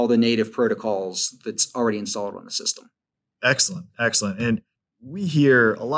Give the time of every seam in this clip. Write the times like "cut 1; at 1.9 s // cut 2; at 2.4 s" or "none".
none